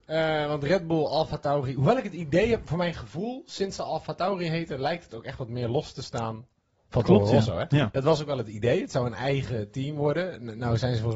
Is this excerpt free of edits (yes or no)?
yes